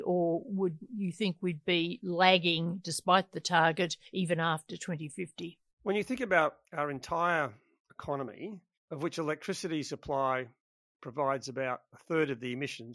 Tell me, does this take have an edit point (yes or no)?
no